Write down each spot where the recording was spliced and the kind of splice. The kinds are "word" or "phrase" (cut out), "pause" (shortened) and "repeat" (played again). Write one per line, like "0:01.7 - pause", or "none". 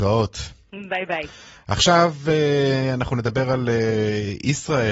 none